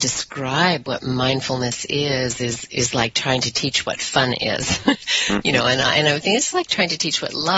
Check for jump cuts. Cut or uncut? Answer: uncut